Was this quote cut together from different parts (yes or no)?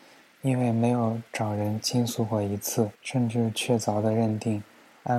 yes